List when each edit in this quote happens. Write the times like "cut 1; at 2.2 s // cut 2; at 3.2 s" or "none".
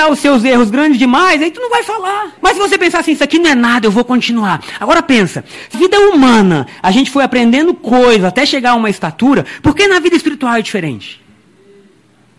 cut 1; at 2.4 s // cut 2; at 5.7 s